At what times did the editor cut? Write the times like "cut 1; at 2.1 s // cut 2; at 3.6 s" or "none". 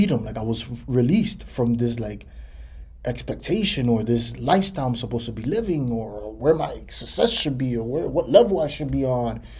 none